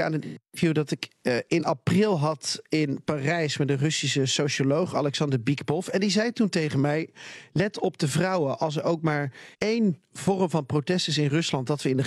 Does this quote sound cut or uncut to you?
cut